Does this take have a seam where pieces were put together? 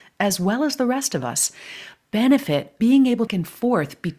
yes; 2 cuts; at 2.8 s, 3.3 s

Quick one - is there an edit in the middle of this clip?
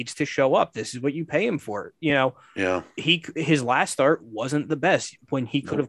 no; 0 cuts

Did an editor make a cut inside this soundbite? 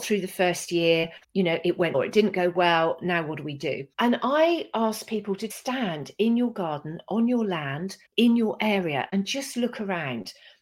yes; 5 cuts; at 1.2 s, 1.9 s, 3.9 s, 5.5 s, 8.1 s

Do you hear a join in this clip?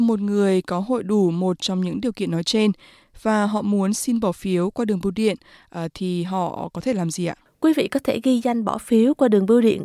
no; 0 cuts

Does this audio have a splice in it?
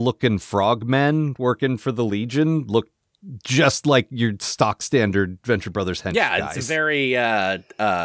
no; 0 cuts

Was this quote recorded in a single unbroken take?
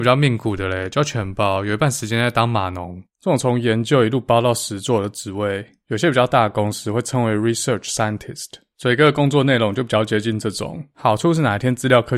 no; 1 cut; at 3.1 s

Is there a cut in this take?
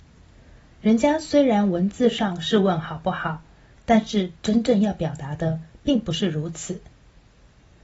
no; 0 cuts

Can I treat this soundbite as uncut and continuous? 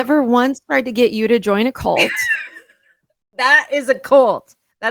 yes; 0 cuts

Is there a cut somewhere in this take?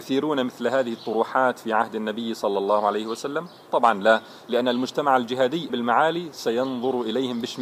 yes; 1 cut; at 5.7 s

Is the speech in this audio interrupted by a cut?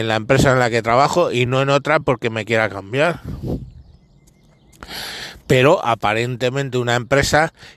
no; 0 cuts

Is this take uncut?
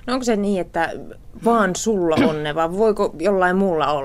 yes; 0 cuts

